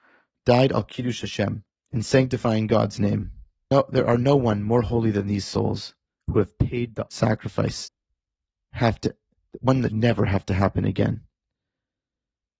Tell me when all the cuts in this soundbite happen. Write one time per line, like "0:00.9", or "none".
0:01.7
0:07.1
0:09.9